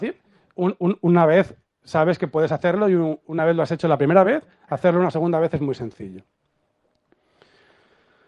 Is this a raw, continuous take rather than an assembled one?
yes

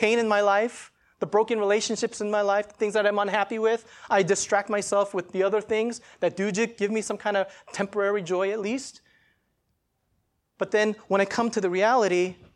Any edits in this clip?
no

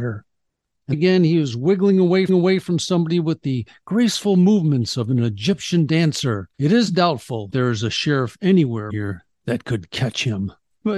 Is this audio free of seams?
no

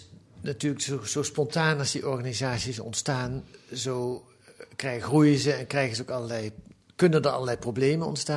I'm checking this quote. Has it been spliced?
no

